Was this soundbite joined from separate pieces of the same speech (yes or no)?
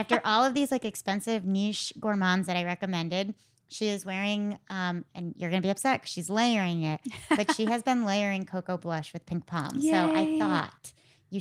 no